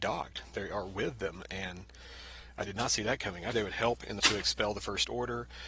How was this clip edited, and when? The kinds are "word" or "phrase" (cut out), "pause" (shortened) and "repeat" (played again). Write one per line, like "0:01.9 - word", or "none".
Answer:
0:03.5 - word
0:04.2 - phrase